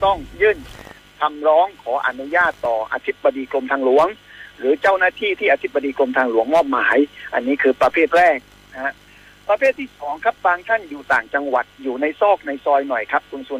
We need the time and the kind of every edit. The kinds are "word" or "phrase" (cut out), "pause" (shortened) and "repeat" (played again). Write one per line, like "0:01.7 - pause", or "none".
none